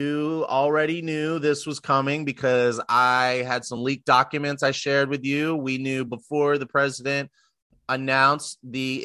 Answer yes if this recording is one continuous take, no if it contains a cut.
yes